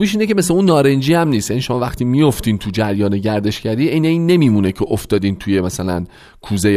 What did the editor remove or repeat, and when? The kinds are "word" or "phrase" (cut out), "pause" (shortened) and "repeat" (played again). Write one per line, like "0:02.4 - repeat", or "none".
none